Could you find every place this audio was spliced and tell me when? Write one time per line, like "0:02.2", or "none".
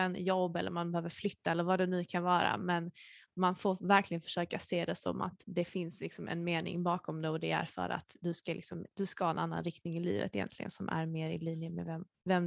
0:05.4